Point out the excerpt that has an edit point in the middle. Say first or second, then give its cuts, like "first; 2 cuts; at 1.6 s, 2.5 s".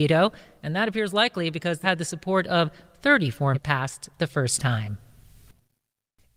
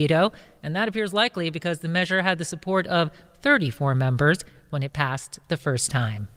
first; 2 cuts; at 1.8 s, 3.5 s